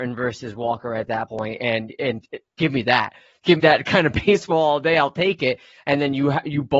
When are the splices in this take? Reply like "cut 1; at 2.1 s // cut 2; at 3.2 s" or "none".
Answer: cut 1; at 2.5 s // cut 2; at 3.6 s

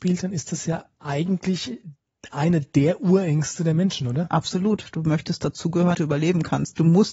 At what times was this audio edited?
cut 1; at 5.9 s

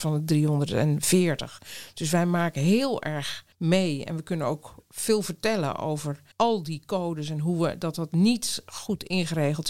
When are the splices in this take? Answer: cut 1; at 3.5 s // cut 2; at 6.3 s

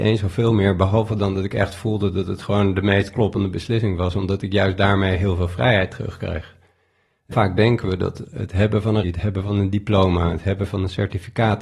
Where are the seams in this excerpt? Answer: cut 1; at 7.3 s // cut 2; at 9.0 s

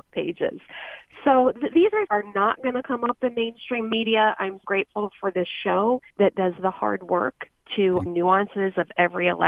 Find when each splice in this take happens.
cut 1; at 2.1 s // cut 2; at 4.6 s // cut 3; at 6.1 s // cut 4; at 8.1 s

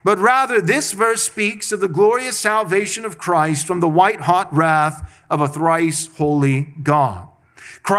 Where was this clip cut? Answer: none

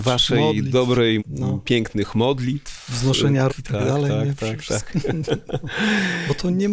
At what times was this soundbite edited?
cut 1; at 1.2 s // cut 2; at 3.5 s

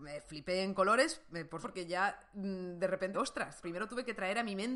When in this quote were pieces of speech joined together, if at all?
cut 1; at 1.6 s // cut 2; at 3.1 s // cut 3; at 3.6 s

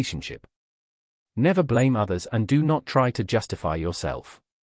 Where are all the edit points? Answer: none

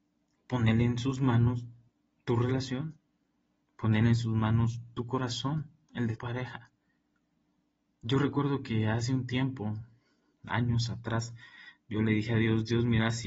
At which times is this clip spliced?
cut 1; at 6.2 s

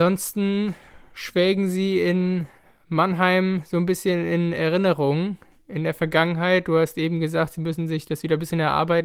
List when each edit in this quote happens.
none

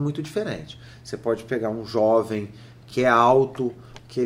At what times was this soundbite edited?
cut 1; at 2.9 s

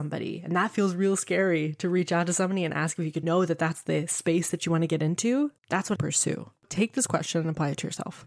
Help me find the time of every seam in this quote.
cut 1; at 3.2 s // cut 2; at 5.6 s // cut 3; at 6.0 s // cut 4; at 6.6 s

